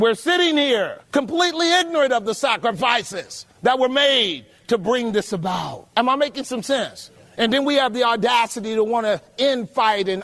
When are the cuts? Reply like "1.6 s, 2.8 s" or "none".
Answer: 1.0 s, 3.5 s, 5.9 s, 7.2 s